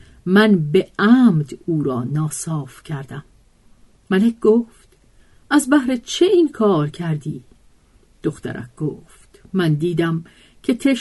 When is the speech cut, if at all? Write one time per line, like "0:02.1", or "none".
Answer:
none